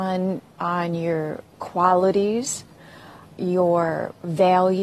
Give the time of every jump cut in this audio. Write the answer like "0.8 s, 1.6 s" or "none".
3.3 s